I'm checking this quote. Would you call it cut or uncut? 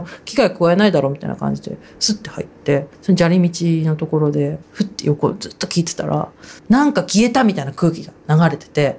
cut